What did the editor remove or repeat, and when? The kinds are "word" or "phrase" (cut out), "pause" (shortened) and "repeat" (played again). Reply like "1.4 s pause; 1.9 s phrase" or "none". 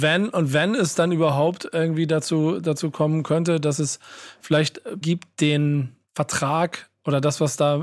5.0 s word; 6.0 s pause